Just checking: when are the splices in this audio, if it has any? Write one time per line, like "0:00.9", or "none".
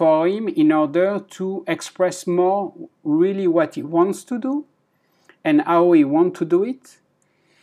none